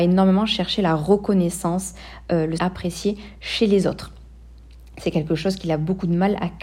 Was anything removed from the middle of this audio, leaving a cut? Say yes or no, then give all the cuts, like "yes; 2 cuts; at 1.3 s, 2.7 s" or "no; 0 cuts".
yes; 1 cut; at 2.6 s